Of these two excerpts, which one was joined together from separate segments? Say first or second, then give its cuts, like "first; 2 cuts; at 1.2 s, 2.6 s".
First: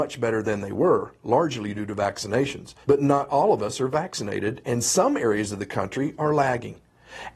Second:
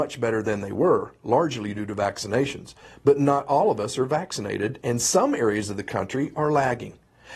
first; 1 cut; at 2.8 s